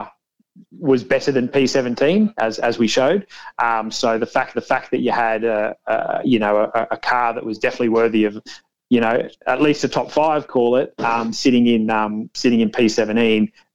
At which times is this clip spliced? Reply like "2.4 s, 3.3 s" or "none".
4.5 s